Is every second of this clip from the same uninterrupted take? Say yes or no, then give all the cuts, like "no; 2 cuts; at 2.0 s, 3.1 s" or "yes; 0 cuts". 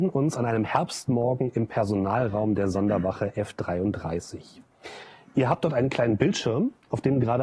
yes; 0 cuts